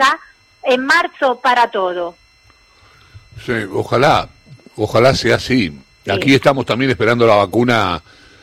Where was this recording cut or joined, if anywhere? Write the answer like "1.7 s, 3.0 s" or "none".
none